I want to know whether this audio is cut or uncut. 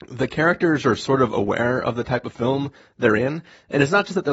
uncut